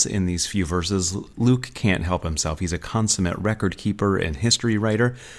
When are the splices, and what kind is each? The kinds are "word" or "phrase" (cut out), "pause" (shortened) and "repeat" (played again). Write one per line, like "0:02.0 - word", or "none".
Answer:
none